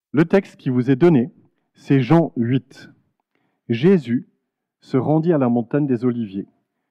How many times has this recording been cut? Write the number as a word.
zero